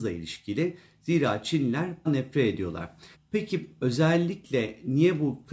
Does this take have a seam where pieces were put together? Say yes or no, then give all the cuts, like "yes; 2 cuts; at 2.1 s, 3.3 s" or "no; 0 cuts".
yes; 2 cuts; at 2.1 s, 3.1 s